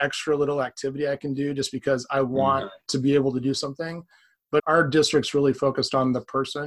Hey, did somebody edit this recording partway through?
yes; 2 cuts; at 2.8 s, 4.6 s

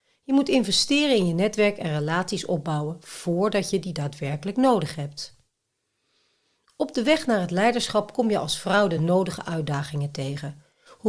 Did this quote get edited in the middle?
no; 0 cuts

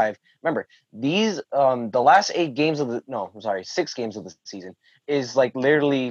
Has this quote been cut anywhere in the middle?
no; 0 cuts

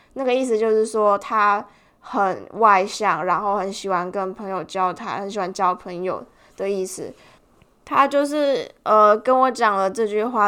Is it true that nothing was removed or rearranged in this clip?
yes; 0 cuts

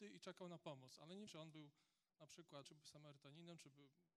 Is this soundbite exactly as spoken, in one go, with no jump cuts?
no; 2 cuts; at 1.3 s, 2.6 s

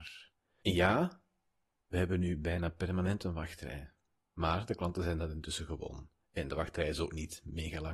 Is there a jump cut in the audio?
no; 0 cuts

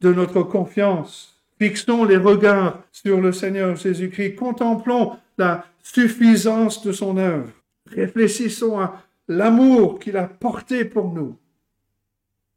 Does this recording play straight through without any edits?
no; 2 cuts; at 2.9 s, 7.6 s

